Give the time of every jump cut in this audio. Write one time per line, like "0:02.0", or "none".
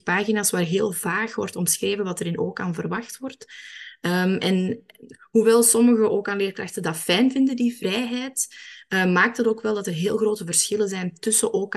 none